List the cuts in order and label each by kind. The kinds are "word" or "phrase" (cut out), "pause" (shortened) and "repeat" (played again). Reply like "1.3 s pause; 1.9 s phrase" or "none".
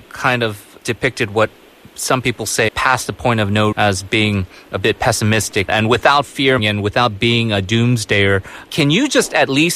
2.7 s word; 3.7 s word; 5.7 s word; 6.6 s word